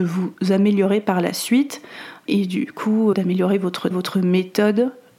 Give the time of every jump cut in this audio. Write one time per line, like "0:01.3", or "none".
0:02.3
0:03.1
0:03.9